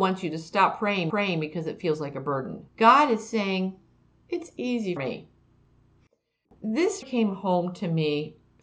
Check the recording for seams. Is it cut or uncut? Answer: cut